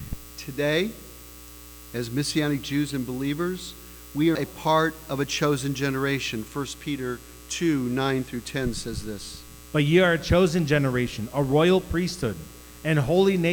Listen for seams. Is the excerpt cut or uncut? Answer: cut